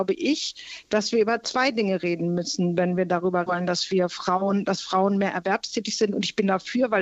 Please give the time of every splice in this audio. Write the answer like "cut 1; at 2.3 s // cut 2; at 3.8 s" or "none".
cut 1; at 3.5 s